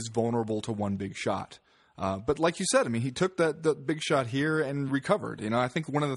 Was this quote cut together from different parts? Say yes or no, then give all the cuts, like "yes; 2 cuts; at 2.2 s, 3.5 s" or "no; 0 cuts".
no; 0 cuts